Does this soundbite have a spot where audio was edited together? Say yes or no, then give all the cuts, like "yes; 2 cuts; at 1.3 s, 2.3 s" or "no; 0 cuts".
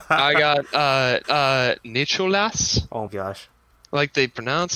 yes; 2 cuts; at 1.2 s, 3.1 s